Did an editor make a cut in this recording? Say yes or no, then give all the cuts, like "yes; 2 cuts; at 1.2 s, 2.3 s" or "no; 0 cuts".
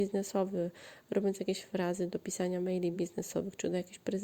no; 0 cuts